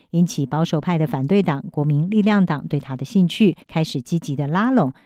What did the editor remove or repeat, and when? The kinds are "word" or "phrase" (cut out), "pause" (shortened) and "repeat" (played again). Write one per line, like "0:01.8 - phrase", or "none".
0:03.6 - pause